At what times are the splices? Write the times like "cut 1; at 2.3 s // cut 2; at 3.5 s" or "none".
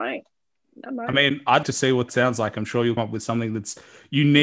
cut 1; at 1.6 s // cut 2; at 2.1 s // cut 3; at 3.0 s